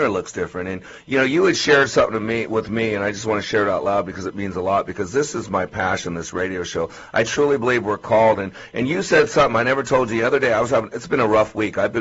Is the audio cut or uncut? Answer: uncut